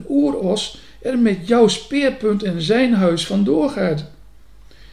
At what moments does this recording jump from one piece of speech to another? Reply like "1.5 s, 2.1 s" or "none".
none